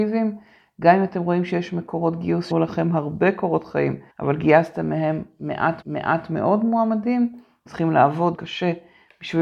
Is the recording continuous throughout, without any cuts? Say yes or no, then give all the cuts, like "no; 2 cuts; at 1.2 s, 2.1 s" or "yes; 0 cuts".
no; 5 cuts; at 2.5 s, 4.1 s, 5.8 s, 7.7 s, 8.3 s